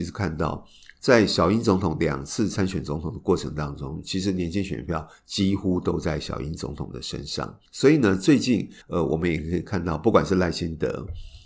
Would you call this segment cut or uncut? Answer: cut